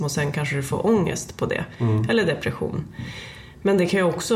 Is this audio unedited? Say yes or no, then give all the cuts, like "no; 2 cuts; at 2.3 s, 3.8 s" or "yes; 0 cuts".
yes; 0 cuts